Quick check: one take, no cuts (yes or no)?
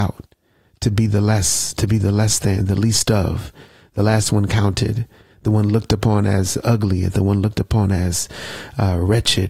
yes